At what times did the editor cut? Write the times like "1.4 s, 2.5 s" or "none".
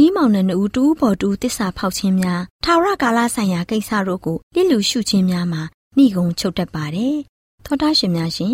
2.5 s, 4.4 s